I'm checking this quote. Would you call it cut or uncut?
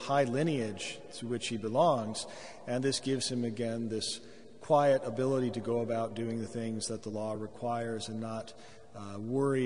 uncut